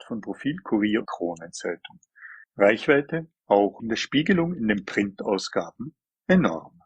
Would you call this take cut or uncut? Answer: cut